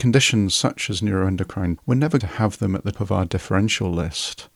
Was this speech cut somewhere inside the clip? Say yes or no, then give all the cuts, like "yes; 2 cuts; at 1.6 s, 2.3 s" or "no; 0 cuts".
yes; 3 cuts; at 1.8 s, 2.2 s, 2.9 s